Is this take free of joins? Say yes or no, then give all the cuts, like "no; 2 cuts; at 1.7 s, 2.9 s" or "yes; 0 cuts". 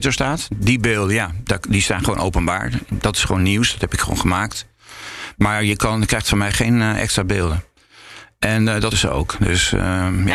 no; 1 cut; at 8.9 s